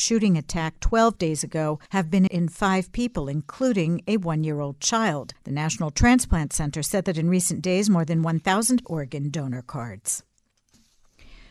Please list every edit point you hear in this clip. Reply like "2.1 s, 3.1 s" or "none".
1.9 s, 2.3 s, 5.3 s, 8.8 s